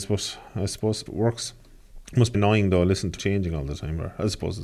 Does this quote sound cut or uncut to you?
cut